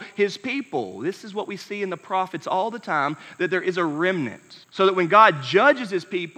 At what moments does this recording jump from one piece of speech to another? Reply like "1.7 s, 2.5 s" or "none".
4.6 s